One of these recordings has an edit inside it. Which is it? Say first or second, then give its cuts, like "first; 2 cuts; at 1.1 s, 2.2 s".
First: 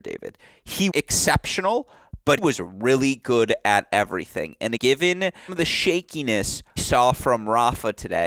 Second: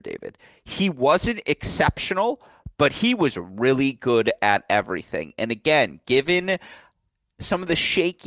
first; 5 cuts; at 0.9 s, 2.4 s, 4.8 s, 5.5 s, 6.8 s